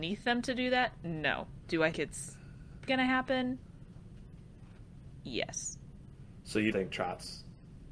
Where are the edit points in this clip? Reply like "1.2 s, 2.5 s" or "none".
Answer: 1.9 s, 2.9 s, 6.7 s